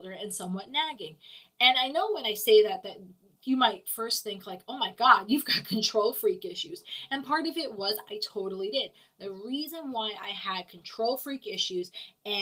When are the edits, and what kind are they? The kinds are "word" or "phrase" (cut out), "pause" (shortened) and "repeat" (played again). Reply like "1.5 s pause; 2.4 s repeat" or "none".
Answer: none